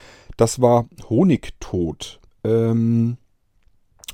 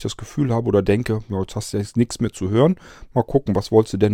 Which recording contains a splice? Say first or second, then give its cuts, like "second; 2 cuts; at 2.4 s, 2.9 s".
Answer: first; 1 cut; at 2.3 s